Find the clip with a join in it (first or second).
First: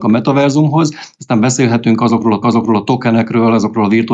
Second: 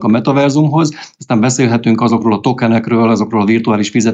first